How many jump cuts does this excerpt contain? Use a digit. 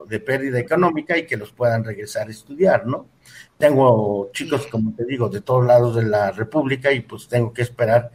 0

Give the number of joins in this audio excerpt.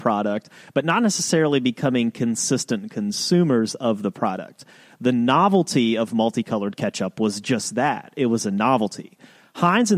0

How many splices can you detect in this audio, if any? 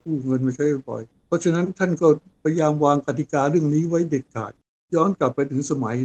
0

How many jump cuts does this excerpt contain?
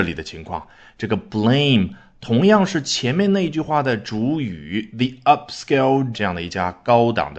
1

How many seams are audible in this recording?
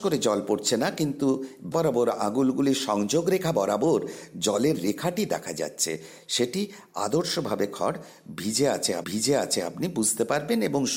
2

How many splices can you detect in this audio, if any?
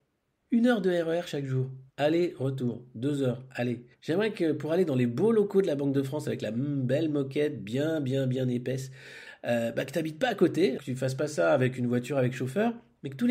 3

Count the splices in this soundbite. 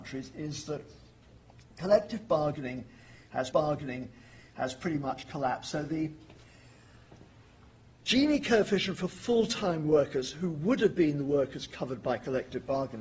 1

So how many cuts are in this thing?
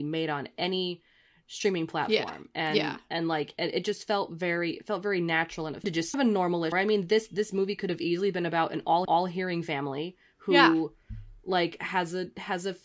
4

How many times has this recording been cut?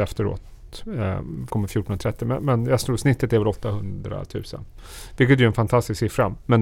1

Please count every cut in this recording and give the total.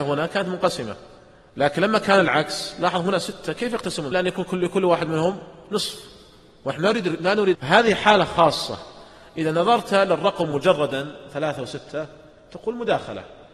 2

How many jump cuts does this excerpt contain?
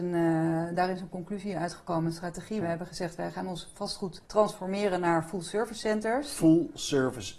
2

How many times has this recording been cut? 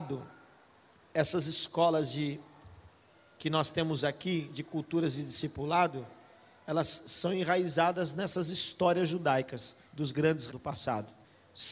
2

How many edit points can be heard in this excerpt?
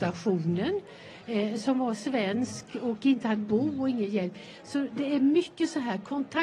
1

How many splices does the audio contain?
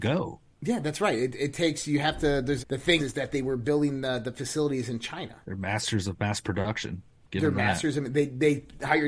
3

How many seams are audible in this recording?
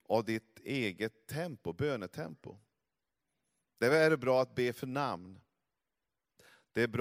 0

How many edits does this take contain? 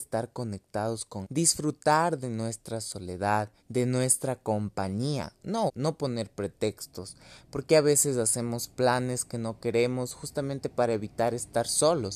3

